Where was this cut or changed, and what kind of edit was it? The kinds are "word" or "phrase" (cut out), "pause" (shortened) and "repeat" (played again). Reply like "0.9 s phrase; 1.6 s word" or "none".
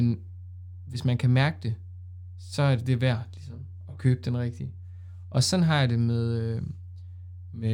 none